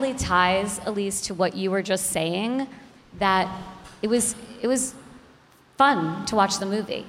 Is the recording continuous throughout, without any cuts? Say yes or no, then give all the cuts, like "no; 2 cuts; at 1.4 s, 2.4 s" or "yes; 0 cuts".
yes; 0 cuts